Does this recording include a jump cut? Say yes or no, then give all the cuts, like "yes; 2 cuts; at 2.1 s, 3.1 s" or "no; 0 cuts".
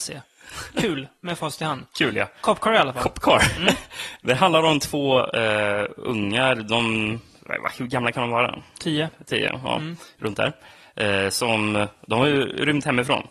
no; 0 cuts